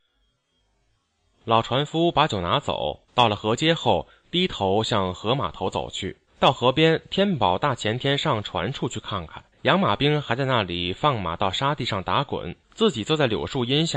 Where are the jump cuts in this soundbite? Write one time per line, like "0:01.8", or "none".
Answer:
0:03.1
0:06.3
0:09.5
0:12.6